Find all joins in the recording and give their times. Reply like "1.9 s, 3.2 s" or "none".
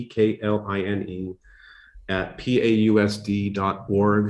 none